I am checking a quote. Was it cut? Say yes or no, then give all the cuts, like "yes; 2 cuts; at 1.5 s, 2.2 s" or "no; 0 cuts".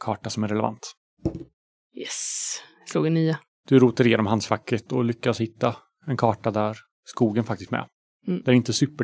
yes; 1 cut; at 7.7 s